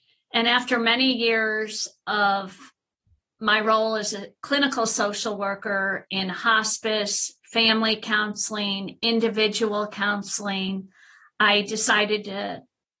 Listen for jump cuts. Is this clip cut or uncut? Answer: uncut